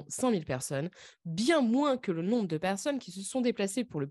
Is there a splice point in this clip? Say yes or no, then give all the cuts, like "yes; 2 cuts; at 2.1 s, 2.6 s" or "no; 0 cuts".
no; 0 cuts